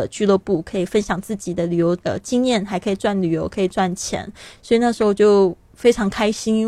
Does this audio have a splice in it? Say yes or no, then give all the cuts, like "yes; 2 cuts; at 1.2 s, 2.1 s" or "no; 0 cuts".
yes; 1 cut; at 2.0 s